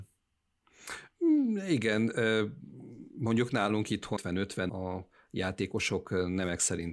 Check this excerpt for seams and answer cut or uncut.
cut